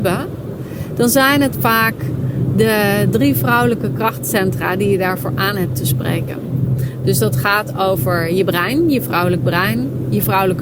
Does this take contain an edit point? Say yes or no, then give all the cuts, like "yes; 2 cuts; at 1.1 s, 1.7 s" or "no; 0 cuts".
no; 0 cuts